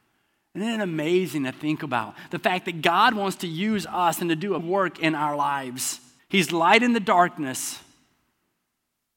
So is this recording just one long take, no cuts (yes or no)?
no